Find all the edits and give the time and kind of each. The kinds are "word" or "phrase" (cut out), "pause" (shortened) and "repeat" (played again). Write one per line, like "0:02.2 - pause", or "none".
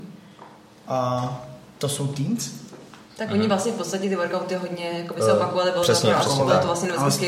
none